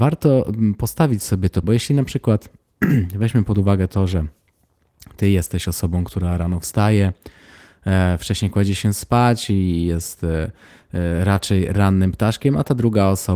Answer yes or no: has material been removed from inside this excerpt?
yes